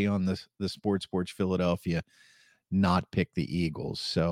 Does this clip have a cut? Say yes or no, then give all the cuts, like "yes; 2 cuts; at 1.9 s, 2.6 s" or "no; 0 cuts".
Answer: no; 0 cuts